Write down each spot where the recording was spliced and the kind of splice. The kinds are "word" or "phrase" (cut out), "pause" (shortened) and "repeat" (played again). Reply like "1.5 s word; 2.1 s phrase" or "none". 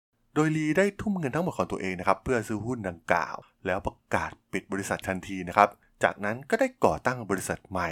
5.0 s word